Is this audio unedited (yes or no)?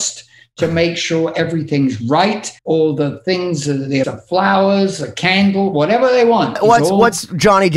no